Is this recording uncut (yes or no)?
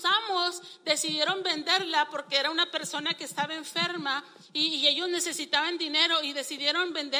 yes